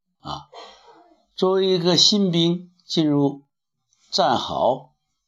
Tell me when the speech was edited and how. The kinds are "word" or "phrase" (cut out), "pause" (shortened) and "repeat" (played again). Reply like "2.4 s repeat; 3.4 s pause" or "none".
none